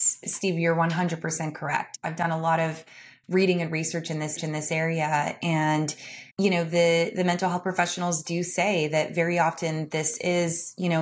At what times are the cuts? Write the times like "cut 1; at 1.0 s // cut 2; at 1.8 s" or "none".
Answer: cut 1; at 4.4 s // cut 2; at 6.3 s